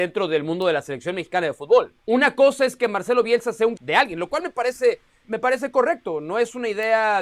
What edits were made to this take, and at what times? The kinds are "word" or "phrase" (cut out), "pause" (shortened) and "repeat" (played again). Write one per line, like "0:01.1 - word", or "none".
0:02.0 - pause
0:03.8 - word
0:05.2 - word

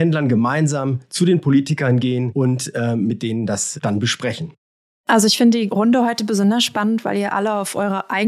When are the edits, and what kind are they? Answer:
none

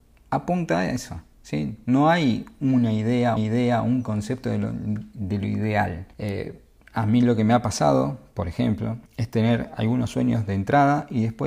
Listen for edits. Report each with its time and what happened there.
0:03.4 - repeat
0:06.1 - pause
0:09.1 - pause

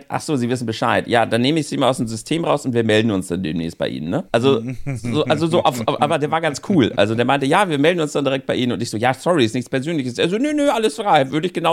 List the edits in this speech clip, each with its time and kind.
0:04.3 - pause

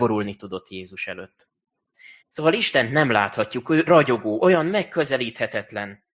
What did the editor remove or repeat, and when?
0:02.2 - pause
0:03.9 - word

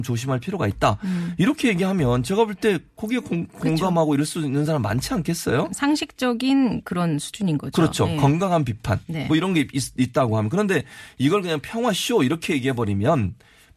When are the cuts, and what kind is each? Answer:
none

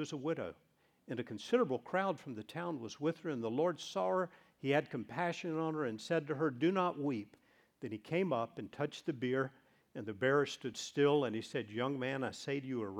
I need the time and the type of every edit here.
none

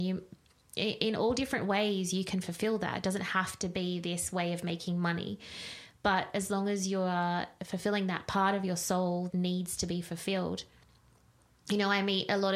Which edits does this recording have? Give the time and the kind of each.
0:09.3 - word

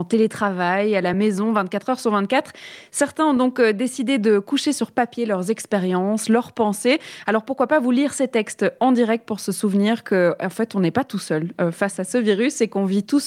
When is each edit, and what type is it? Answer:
none

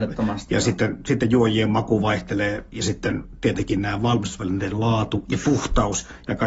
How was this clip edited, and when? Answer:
none

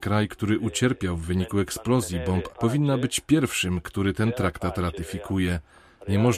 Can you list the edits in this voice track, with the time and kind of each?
0:02.5 - word

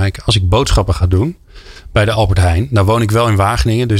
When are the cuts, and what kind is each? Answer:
none

